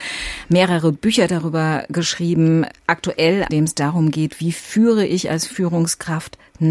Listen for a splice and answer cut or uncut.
cut